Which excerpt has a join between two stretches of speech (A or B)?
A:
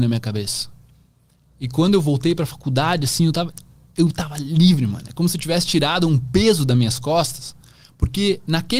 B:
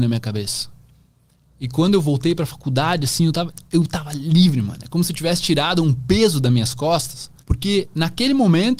B